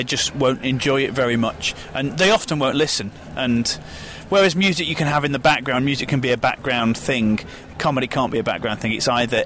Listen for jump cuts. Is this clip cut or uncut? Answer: uncut